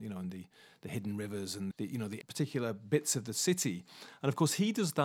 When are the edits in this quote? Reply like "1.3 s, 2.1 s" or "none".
1.7 s, 2.2 s